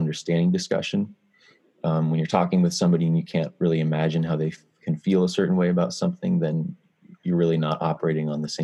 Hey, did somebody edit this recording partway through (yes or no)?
no